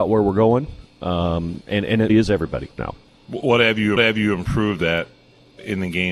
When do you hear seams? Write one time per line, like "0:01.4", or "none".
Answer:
0:02.1
0:02.8
0:04.0